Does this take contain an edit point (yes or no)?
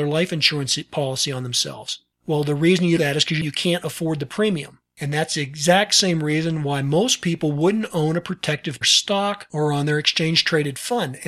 yes